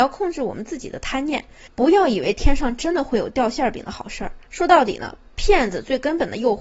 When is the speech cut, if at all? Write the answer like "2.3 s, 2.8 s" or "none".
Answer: 4.5 s